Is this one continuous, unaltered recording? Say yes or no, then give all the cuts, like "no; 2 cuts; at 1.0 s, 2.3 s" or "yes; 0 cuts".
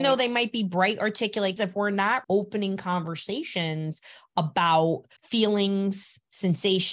no; 3 cuts; at 1.6 s, 2.2 s, 5.2 s